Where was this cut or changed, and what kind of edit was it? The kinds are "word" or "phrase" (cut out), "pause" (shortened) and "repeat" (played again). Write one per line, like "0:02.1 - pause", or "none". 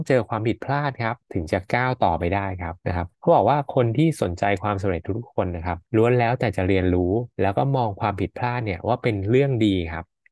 0:01.2 - pause
0:02.8 - pause
0:03.1 - pause
0:05.9 - pause
0:07.3 - pause